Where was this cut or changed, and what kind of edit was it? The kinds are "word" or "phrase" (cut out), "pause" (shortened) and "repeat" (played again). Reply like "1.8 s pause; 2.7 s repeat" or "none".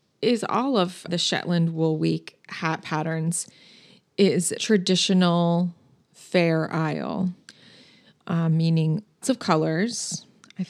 1.1 s word; 4.6 s word; 9.2 s word